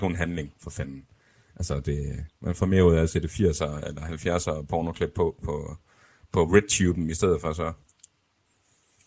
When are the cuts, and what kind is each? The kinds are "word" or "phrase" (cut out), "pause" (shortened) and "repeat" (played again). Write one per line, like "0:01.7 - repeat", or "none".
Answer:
none